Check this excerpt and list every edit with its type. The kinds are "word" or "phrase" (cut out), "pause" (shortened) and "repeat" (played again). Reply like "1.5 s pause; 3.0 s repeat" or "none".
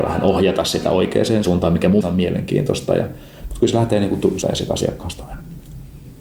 1.4 s phrase; 2.0 s word; 4.4 s word